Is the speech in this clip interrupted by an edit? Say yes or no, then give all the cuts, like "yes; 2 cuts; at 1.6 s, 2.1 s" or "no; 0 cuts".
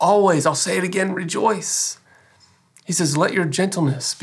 no; 0 cuts